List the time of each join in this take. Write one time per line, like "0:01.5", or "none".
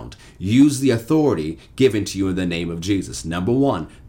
none